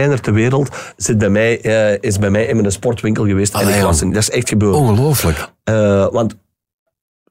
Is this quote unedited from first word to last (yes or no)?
yes